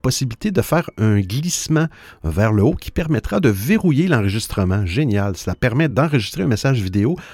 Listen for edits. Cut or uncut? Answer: uncut